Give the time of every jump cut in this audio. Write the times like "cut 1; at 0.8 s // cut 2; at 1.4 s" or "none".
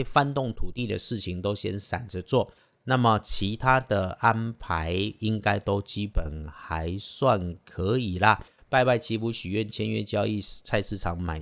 none